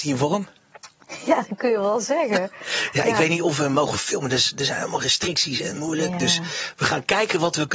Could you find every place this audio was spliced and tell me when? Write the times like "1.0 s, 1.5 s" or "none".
none